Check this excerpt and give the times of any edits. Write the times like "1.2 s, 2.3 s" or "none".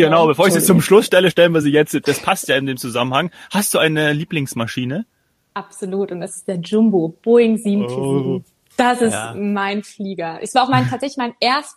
none